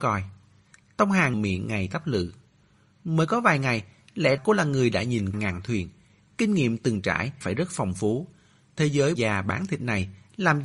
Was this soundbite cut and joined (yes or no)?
yes